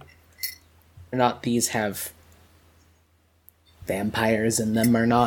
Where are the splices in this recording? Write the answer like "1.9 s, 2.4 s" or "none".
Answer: 1.1 s

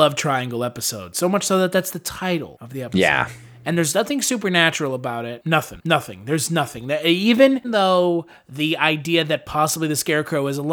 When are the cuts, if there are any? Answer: 7.6 s

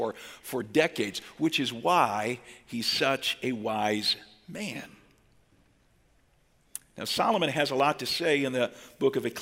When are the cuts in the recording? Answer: none

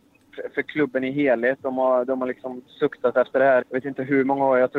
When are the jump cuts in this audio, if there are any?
3.6 s

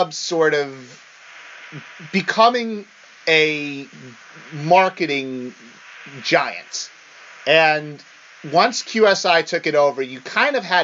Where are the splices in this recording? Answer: none

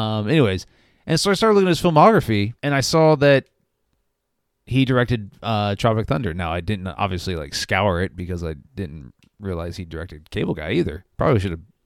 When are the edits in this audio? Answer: 2.6 s, 8.6 s

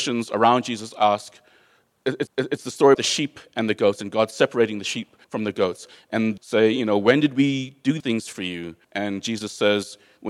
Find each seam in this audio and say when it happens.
2.3 s, 2.9 s, 5.2 s, 6.4 s, 8.0 s, 8.8 s

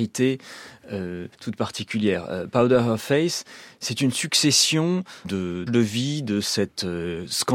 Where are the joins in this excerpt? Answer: 1.3 s, 5.2 s, 5.7 s

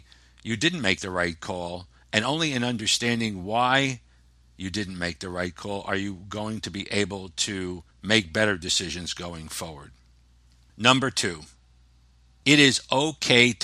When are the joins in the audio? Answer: 7.9 s

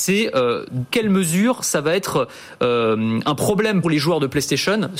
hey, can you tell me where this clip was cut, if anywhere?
0.9 s, 3.8 s

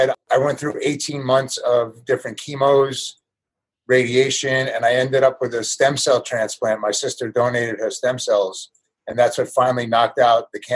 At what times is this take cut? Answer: none

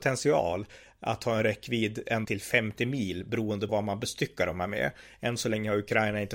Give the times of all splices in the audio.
2.2 s, 3.7 s

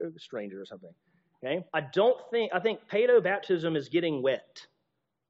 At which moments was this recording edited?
1.7 s

